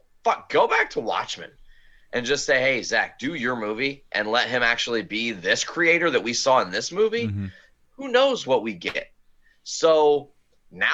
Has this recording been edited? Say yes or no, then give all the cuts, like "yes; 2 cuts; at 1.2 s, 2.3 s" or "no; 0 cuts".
no; 0 cuts